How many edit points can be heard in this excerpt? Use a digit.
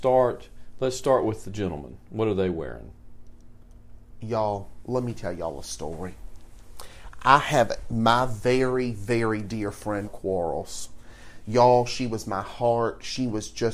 1